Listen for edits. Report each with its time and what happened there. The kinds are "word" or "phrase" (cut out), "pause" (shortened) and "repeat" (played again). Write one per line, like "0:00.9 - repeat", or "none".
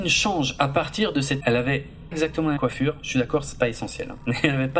0:01.4 - word
0:02.1 - word
0:02.6 - word